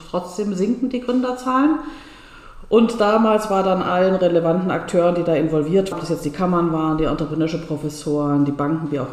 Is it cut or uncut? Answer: cut